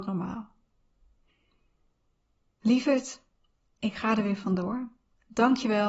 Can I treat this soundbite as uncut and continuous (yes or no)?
yes